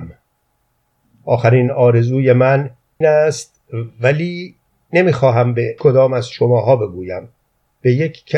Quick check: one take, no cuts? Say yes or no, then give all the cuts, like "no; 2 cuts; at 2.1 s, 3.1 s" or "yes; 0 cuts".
no; 2 cuts; at 3.0 s, 5.8 s